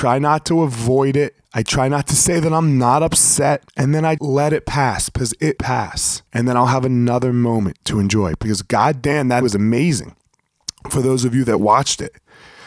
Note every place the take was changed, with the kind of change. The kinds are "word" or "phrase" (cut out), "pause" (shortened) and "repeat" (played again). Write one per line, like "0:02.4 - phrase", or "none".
0:01.4 - pause
0:03.7 - pause
0:04.2 - word
0:05.6 - phrase
0:06.3 - pause
0:09.4 - word